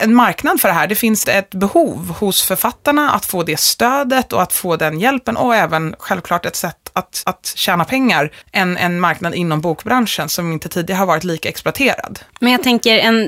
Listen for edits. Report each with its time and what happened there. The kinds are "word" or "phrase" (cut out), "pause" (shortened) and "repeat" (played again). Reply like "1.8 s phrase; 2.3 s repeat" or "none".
1.2 s word; 7.2 s repeat; 8.4 s word